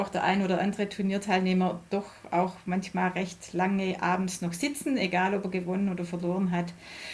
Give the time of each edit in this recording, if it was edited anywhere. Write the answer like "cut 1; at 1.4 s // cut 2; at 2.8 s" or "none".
none